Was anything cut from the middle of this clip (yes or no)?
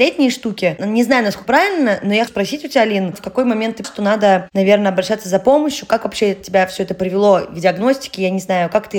yes